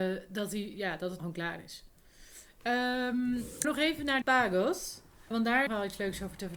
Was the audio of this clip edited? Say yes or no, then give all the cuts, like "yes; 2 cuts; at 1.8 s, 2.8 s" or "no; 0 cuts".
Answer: yes; 5 cuts; at 1.2 s, 3.6 s, 4.2 s, 5.3 s, 5.7 s